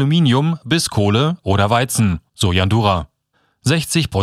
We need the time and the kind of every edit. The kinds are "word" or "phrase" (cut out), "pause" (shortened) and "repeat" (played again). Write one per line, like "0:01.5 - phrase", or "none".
0:02.3 - pause
0:03.3 - pause